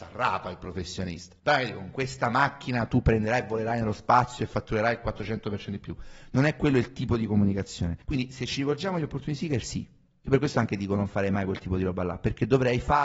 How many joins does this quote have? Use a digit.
2